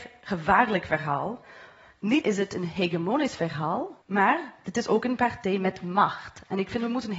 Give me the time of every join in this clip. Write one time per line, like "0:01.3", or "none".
0:02.2
0:04.0